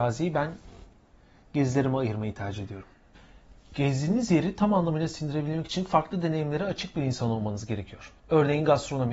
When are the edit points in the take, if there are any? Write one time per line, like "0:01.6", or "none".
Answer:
0:08.2